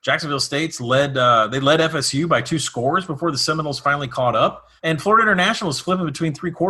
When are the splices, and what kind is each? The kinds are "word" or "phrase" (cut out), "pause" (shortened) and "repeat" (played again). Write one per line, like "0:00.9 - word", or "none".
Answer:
0:04.8 - pause